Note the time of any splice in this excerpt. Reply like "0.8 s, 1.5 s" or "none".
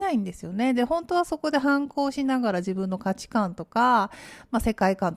none